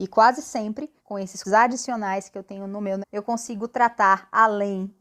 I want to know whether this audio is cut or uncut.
cut